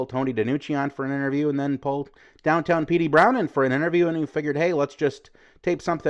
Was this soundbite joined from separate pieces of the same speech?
no; 0 cuts

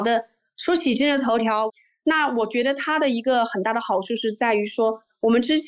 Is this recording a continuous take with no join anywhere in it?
yes; 0 cuts

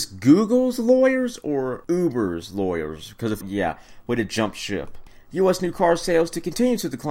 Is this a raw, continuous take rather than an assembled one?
no; 1 cut; at 3.4 s

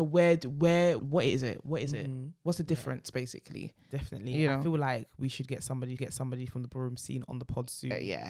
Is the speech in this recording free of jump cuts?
no; 2 cuts; at 1.0 s, 6.0 s

